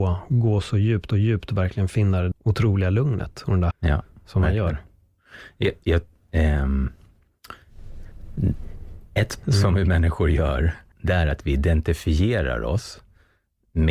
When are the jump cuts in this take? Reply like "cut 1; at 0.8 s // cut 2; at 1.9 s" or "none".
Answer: cut 1; at 1.1 s // cut 2; at 2.3 s // cut 3; at 3.7 s // cut 4; at 9.4 s // cut 5; at 10.9 s